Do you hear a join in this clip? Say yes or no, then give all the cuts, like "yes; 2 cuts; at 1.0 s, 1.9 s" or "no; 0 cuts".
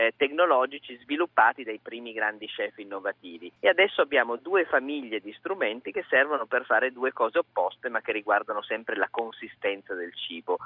yes; 1 cut; at 3.6 s